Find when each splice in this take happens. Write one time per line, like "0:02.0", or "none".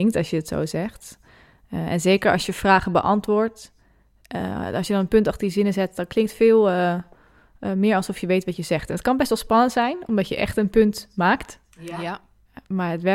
none